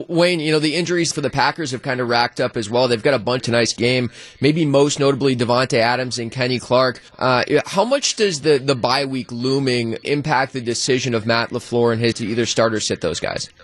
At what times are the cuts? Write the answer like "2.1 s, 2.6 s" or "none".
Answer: 1.1 s, 3.4 s, 7.1 s, 10.0 s, 12.1 s